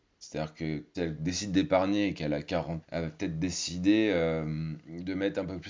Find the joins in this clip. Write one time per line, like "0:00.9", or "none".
0:00.9
0:02.8